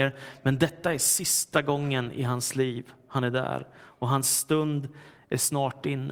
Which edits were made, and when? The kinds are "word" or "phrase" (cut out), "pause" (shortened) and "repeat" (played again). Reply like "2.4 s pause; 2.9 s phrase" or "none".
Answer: none